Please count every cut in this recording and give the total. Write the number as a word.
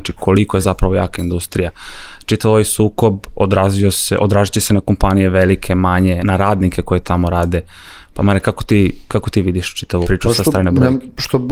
two